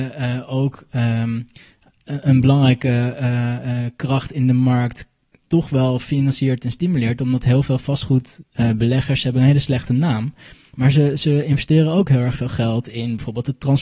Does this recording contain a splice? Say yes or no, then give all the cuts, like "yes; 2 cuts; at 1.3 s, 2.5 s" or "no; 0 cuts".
no; 0 cuts